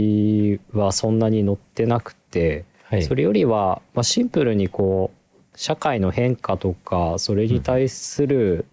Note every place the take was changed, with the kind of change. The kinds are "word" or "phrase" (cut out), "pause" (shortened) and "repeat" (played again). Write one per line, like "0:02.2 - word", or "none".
0:02.7 - pause
0:05.5 - pause

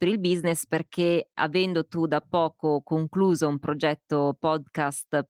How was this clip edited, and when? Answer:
none

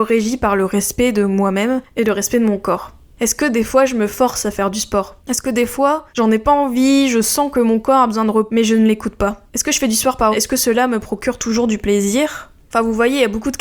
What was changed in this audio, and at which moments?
0:03.0 - pause
0:05.2 - pause
0:06.1 - pause
0:09.5 - pause
0:10.3 - word

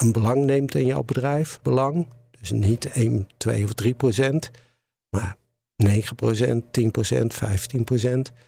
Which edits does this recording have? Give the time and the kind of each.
0:01.6 - phrase

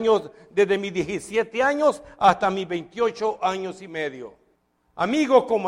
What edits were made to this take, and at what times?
0:04.5 - pause

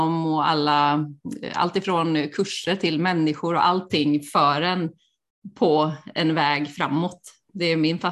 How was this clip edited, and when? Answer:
none

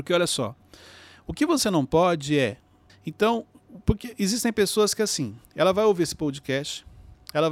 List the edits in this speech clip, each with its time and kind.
0:02.9 - pause
0:05.4 - pause

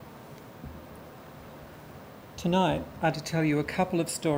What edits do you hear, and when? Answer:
0:03.1 - word

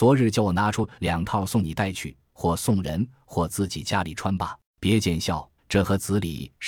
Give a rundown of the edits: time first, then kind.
0:04.7 - pause
0:05.6 - pause

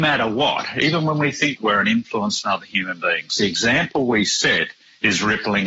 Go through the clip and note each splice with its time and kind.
0:01.6 - phrase

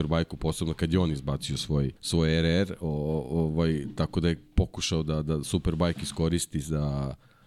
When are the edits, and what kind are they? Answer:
0:02.0 - pause

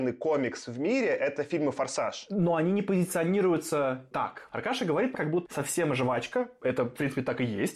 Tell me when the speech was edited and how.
0:05.1 - phrase
0:05.5 - word

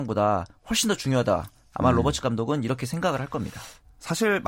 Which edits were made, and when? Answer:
none

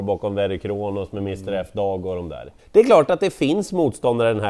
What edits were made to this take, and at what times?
0:02.6 - pause

